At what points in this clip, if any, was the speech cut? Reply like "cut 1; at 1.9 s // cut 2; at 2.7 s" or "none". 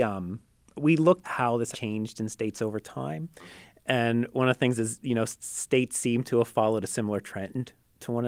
cut 1; at 1.2 s // cut 2; at 1.7 s